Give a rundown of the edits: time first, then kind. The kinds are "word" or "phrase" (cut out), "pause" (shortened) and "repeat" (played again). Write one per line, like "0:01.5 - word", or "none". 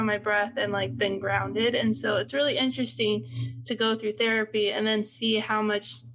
none